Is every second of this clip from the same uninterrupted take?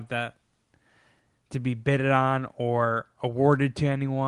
yes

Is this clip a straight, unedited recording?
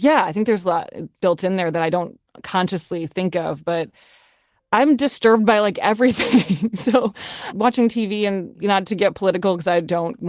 yes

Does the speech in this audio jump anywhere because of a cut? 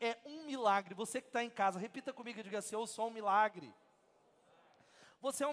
no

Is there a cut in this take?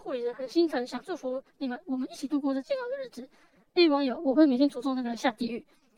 no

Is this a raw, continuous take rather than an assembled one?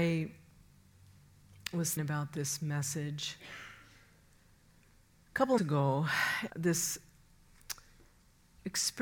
no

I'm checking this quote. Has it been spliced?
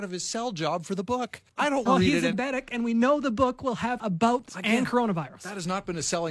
yes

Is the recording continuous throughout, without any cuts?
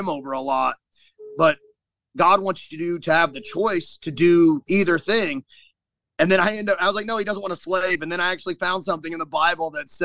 yes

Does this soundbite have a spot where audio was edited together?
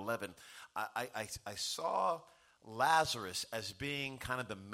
no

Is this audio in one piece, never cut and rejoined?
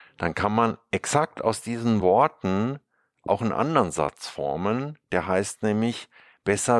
yes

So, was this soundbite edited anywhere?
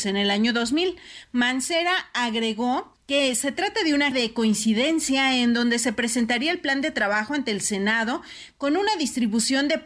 yes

